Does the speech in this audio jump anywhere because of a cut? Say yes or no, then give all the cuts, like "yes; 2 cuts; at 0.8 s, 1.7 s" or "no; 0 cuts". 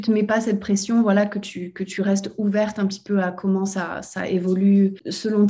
no; 0 cuts